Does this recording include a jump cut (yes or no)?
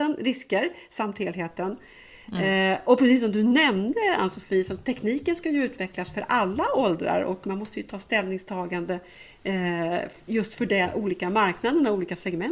no